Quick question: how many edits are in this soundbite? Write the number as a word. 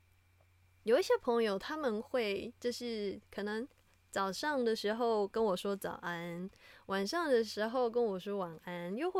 one